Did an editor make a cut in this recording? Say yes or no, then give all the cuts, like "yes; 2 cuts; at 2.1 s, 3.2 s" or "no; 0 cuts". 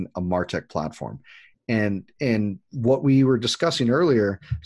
no; 0 cuts